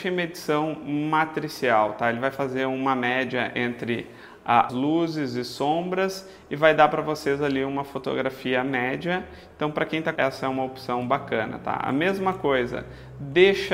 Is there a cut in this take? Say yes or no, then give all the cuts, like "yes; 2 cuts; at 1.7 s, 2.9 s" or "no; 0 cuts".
yes; 2 cuts; at 4.7 s, 10.2 s